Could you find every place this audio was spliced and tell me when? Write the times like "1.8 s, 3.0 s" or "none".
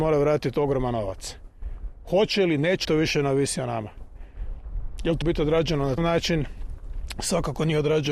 2.8 s, 5.2 s, 6.0 s